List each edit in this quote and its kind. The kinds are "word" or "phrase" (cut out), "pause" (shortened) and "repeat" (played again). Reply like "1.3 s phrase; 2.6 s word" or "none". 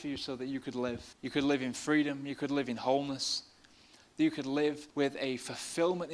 1.1 s pause; 4.9 s pause